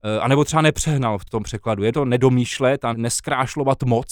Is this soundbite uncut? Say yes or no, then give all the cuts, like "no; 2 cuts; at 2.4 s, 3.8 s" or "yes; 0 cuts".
no; 3 cuts; at 1.3 s, 1.9 s, 2.9 s